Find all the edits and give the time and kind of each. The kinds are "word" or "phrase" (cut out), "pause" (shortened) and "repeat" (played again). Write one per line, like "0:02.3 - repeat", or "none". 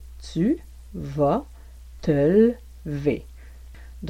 none